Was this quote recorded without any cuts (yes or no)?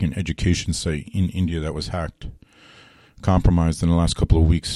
yes